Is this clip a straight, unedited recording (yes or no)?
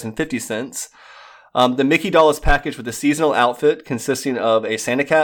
yes